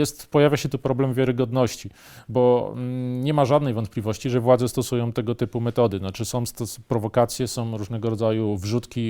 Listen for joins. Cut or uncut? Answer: uncut